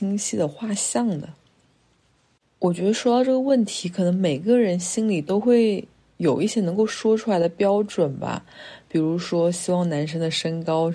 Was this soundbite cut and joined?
no; 0 cuts

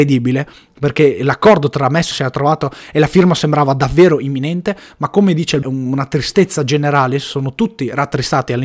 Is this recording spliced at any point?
yes; 2 cuts; at 2.1 s, 5.6 s

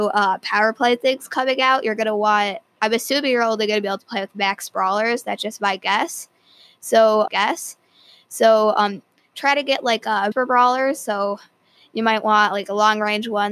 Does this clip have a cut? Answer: yes; 2 cuts; at 7.3 s, 10.3 s

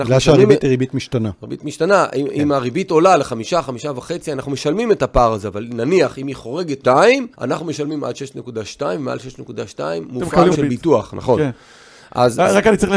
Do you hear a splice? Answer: yes; 3 cuts; at 6.8 s, 7.3 s, 10.5 s

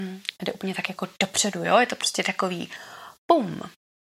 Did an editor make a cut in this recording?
yes; 1 cut; at 3.2 s

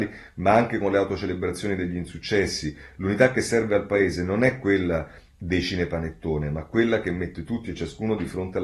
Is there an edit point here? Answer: no; 0 cuts

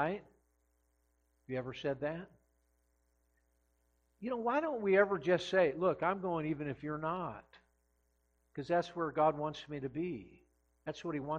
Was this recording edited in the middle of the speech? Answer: no; 0 cuts

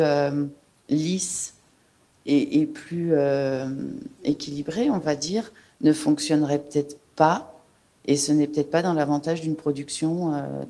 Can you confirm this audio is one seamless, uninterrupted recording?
yes; 0 cuts

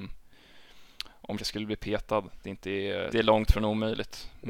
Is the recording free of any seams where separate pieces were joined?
no; 3 cuts; at 1.4 s, 2.4 s, 3.1 s

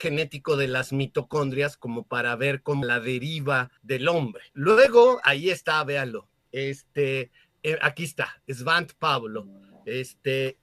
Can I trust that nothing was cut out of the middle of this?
no; 3 cuts; at 2.8 s, 3.8 s, 4.5 s

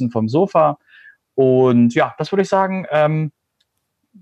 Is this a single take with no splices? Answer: yes; 0 cuts

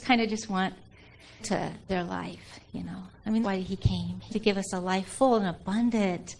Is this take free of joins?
no; 4 cuts; at 1.4 s, 1.9 s, 3.4 s, 4.3 s

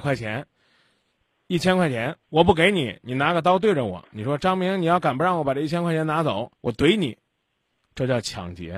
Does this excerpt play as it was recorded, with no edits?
no; 2 cuts; at 2.2 s, 6.6 s

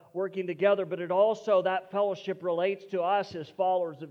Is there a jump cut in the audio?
no; 0 cuts

